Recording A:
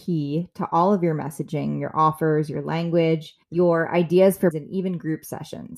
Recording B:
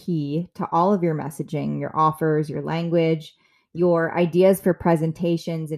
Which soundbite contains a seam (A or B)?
A